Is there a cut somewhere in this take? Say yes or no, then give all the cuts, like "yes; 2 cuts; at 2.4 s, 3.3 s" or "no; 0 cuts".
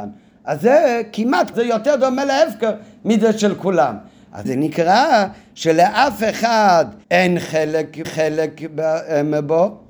yes; 4 cuts; at 1.5 s, 4.4 s, 7.0 s, 8.0 s